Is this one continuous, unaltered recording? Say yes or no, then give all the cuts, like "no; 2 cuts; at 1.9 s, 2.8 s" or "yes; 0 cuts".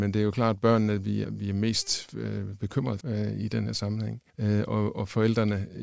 no; 3 cuts; at 1.2 s, 3.0 s, 4.3 s